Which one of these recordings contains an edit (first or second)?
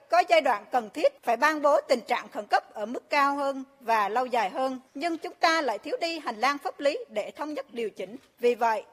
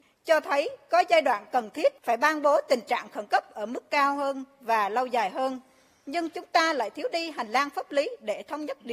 first